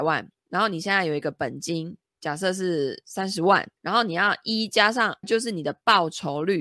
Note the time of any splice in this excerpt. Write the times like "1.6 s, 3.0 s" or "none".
3.8 s, 5.2 s